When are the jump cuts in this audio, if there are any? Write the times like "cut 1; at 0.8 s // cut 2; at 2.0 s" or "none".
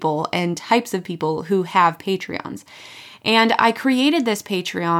none